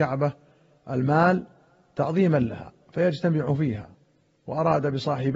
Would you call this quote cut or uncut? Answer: uncut